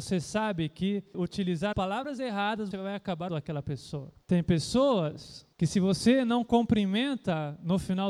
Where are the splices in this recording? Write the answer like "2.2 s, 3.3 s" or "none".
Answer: 1.1 s, 1.7 s, 2.7 s, 3.3 s, 4.2 s, 5.5 s